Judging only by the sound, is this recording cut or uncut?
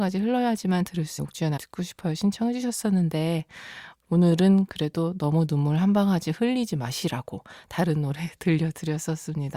cut